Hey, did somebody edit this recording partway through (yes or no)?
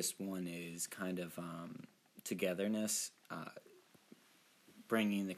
no